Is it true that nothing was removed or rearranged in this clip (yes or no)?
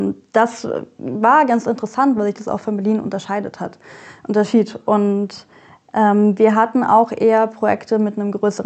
yes